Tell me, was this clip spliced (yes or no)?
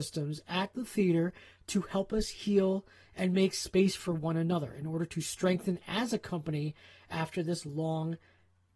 no